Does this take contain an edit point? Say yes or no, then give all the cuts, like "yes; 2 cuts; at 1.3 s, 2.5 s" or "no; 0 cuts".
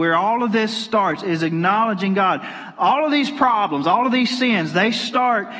no; 0 cuts